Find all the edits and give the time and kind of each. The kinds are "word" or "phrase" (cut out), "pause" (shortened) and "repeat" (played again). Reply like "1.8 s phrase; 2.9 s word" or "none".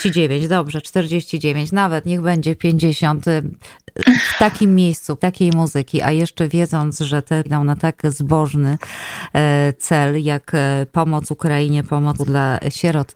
5.2 s word; 7.5 s word; 12.2 s word